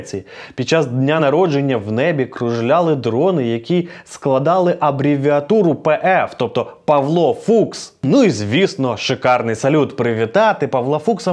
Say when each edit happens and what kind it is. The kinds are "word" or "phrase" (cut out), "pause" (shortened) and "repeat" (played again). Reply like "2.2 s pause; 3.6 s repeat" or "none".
none